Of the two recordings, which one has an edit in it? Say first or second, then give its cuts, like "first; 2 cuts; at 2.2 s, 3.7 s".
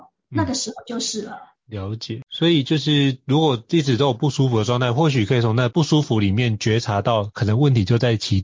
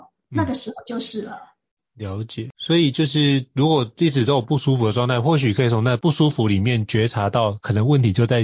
first; 1 cut; at 1.6 s